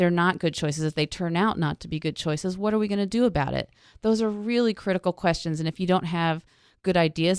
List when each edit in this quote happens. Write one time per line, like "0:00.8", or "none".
none